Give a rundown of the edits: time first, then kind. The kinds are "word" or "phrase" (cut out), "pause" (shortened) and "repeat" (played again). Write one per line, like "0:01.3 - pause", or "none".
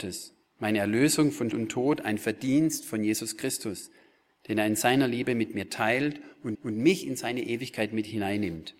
0:01.5 - word
0:06.5 - repeat